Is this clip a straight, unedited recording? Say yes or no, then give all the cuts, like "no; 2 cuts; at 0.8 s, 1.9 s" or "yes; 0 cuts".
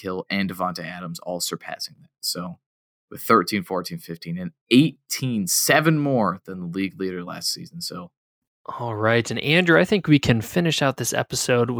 yes; 0 cuts